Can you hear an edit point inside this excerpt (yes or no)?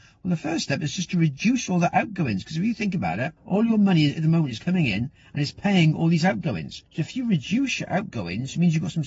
yes